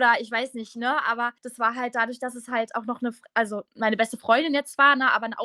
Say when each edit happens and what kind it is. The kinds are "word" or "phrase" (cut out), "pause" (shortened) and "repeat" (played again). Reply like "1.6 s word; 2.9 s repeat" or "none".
1.4 s pause